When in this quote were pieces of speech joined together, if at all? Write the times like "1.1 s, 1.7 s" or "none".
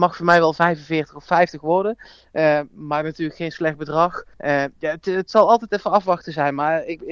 4.3 s